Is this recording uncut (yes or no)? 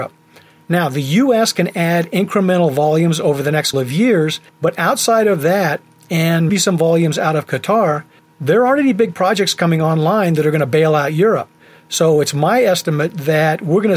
no